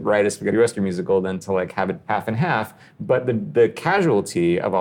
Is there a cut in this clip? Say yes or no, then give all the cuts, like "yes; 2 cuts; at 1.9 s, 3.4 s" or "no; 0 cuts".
yes; 1 cut; at 2.0 s